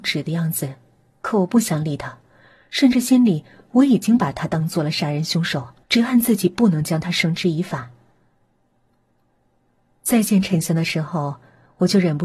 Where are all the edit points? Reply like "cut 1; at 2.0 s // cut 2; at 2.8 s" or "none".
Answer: cut 1; at 5.8 s